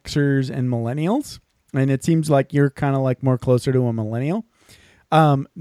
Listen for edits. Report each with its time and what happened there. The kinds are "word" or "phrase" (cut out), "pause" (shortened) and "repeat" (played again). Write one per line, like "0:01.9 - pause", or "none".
none